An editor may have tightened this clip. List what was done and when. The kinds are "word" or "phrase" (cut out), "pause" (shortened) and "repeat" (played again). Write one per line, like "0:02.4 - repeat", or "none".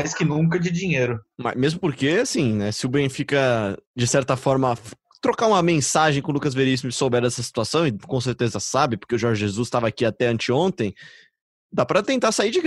0:03.9 - pause